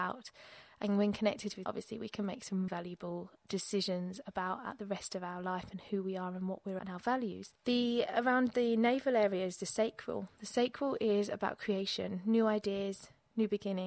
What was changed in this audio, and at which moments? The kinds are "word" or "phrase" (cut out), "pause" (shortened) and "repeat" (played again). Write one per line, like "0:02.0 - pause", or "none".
0:01.7 - word
0:02.7 - word
0:03.4 - pause
0:06.8 - word
0:07.6 - pause